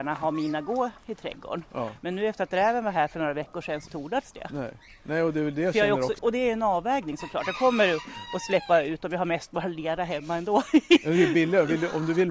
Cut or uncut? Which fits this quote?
cut